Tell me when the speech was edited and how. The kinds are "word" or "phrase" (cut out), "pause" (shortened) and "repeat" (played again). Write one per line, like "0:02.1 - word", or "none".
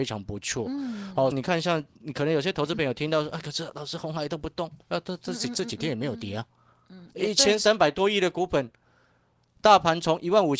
0:01.3 - phrase
0:04.8 - pause